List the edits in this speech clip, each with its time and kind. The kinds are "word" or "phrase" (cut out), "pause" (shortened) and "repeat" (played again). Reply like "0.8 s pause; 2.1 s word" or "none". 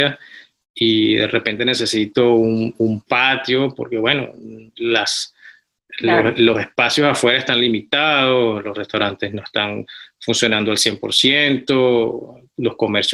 4.7 s pause